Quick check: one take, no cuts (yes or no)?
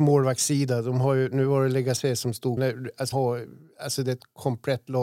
no